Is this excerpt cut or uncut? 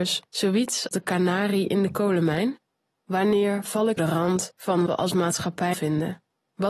cut